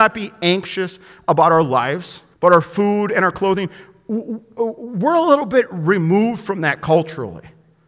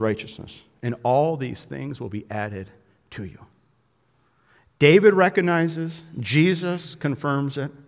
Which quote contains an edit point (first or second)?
first